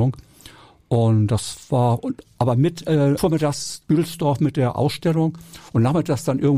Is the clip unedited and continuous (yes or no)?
no